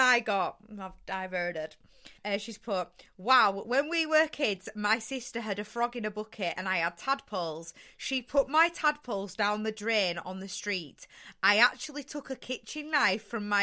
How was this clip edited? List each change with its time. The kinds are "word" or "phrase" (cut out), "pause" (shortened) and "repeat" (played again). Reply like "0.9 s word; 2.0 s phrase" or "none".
2.2 s pause